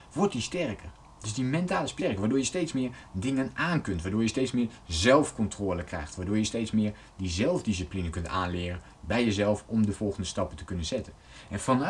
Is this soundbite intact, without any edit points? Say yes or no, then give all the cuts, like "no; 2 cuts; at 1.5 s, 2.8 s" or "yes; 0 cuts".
no; 1 cut; at 2.0 s